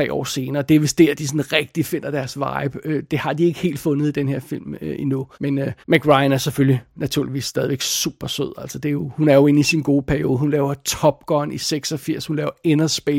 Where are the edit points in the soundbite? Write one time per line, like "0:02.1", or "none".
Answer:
0:05.3
0:05.8